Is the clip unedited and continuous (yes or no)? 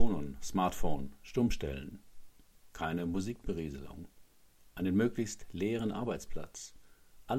yes